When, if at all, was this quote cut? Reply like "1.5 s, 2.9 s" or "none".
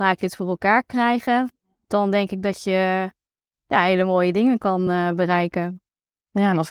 none